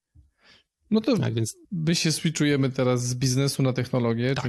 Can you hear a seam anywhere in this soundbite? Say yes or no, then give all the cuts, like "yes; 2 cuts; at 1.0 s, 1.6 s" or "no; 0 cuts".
yes; 1 cut; at 1.6 s